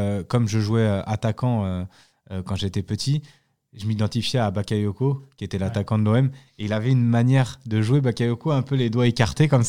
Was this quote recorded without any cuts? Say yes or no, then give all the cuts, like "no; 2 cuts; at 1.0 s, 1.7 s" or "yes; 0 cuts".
yes; 0 cuts